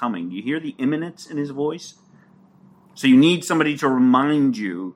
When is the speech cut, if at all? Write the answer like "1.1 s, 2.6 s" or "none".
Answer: none